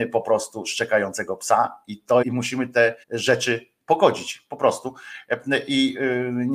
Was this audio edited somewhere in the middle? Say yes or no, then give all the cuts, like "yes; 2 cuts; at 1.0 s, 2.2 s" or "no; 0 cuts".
yes; 2 cuts; at 2.2 s, 3.0 s